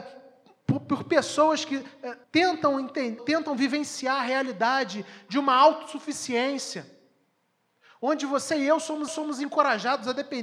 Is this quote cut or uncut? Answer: cut